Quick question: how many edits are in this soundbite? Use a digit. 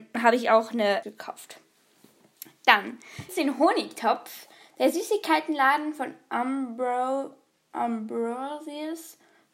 2